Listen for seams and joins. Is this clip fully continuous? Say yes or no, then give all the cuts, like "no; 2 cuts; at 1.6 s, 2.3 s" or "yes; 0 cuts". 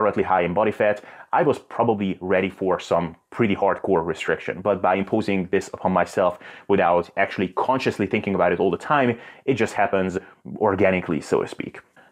yes; 0 cuts